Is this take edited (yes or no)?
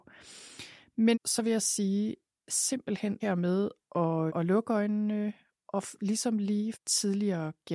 yes